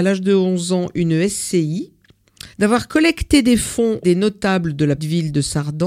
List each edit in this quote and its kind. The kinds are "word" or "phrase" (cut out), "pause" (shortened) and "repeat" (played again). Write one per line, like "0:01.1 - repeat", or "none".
0:02.5 - pause
0:04.0 - word
0:05.0 - word